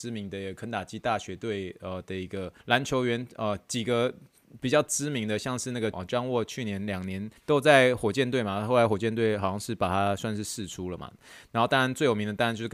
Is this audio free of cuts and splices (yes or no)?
no